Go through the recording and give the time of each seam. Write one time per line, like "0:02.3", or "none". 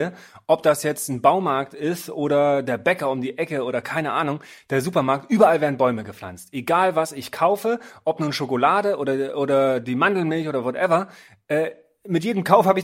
none